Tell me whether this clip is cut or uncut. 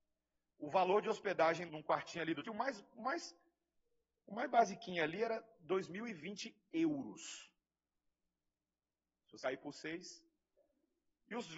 cut